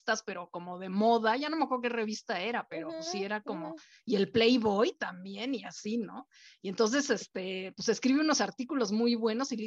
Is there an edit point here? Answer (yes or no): no